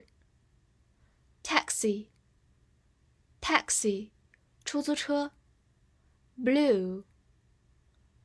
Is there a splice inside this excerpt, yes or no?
no